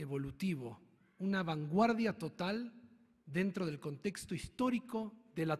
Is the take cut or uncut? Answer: uncut